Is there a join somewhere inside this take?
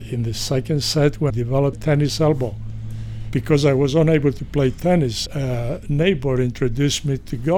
yes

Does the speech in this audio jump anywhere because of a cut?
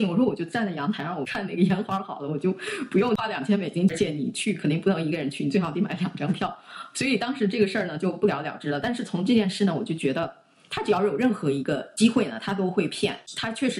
no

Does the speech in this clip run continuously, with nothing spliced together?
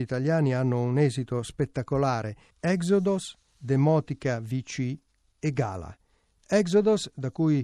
yes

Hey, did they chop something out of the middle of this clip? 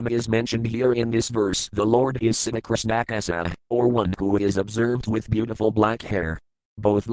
yes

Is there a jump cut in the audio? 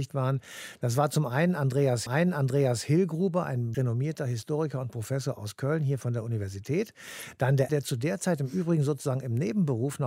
yes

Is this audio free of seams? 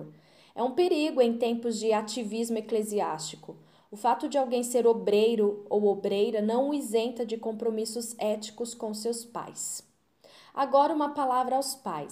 yes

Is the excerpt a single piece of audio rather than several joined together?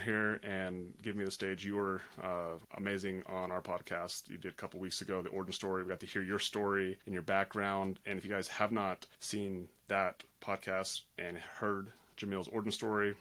no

